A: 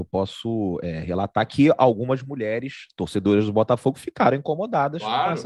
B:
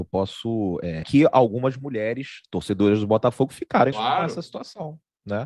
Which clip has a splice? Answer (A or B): B